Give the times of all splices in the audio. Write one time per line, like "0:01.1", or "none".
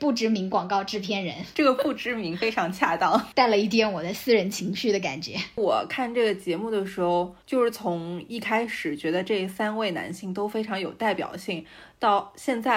0:07.4